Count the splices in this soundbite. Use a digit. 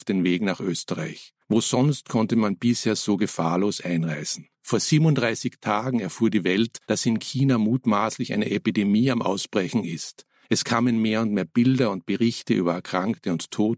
4